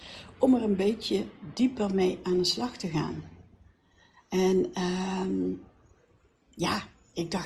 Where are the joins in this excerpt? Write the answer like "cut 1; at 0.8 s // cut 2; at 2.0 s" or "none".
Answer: none